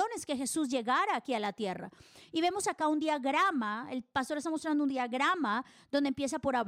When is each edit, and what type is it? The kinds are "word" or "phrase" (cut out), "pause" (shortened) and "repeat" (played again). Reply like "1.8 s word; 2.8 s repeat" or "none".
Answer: none